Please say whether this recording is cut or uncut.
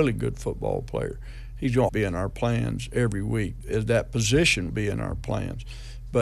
cut